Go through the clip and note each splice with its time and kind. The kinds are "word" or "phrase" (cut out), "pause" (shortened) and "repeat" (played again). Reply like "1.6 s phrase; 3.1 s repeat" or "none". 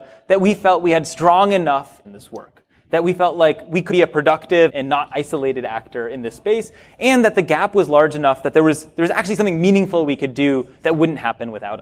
2.0 s phrase; 3.9 s word; 4.7 s word